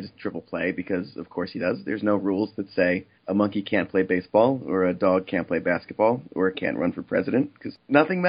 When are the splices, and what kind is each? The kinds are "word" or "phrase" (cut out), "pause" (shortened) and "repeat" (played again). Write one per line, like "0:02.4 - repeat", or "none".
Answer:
0:03.2 - pause
0:06.5 - word